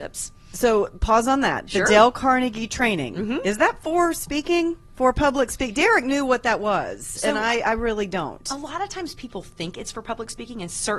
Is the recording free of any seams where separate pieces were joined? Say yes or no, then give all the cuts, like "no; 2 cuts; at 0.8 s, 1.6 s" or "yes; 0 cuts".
yes; 0 cuts